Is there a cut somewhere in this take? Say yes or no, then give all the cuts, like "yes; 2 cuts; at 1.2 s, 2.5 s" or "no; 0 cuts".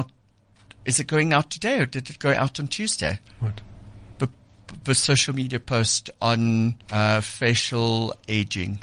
yes; 2 cuts; at 3.3 s, 6.8 s